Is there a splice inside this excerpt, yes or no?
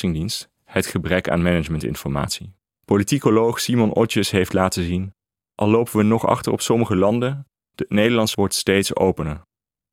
yes